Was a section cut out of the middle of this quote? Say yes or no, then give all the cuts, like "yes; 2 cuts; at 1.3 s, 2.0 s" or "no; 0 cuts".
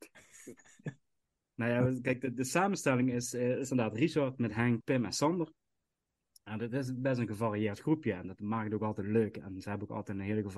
yes; 1 cut; at 4.8 s